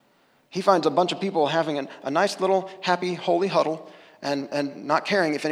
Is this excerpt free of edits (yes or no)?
yes